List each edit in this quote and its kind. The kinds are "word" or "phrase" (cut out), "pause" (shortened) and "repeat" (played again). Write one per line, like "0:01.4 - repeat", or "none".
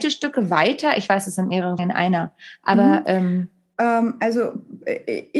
0:01.8 - word